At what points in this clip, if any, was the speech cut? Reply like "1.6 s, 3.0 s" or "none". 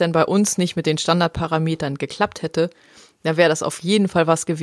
none